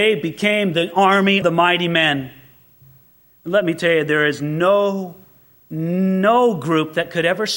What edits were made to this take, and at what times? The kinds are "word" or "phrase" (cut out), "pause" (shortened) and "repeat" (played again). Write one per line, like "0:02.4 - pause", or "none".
0:01.4 - word